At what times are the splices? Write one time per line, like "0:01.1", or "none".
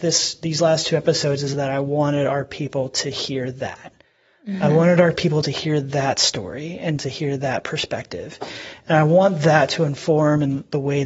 none